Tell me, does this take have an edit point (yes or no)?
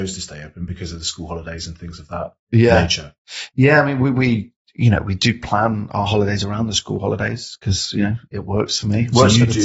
no